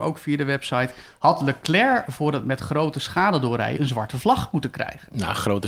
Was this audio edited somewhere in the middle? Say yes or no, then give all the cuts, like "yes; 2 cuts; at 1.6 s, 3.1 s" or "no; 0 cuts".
yes; 1 cut; at 3.8 s